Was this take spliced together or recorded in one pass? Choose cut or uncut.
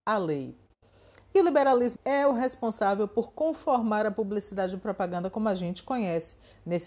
cut